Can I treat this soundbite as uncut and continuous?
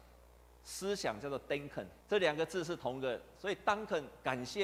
no; 1 cut; at 2.0 s

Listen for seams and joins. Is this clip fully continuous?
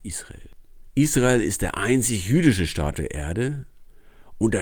no; 1 cut; at 2.9 s

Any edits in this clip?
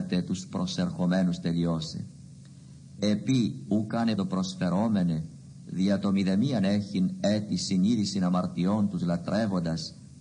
yes; 1 cut; at 4.2 s

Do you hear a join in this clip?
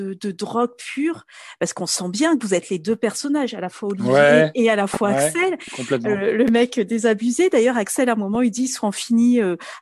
no; 0 cuts

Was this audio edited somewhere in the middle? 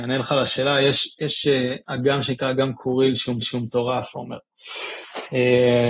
yes; 2 cuts; at 1.8 s, 3.4 s

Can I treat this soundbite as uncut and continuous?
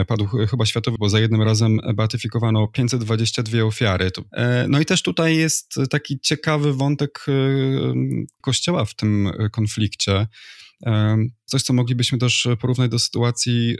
no; 3 cuts; at 1.0 s, 8.4 s, 11.5 s

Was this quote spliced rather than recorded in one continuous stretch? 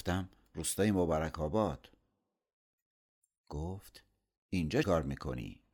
yes; 1 cut; at 4.8 s

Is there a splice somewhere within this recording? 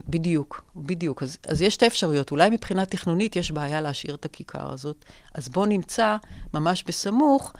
no; 0 cuts

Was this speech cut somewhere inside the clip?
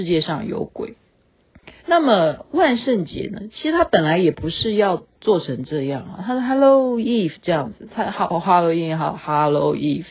yes; 1 cut; at 1.8 s

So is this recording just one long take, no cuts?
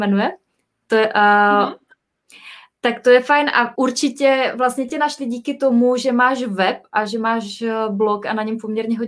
no; 1 cut; at 3.7 s

